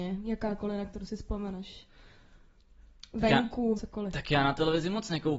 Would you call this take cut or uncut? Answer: cut